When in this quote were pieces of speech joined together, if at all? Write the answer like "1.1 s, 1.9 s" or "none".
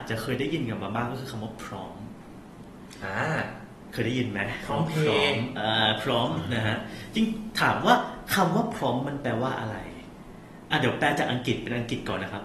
none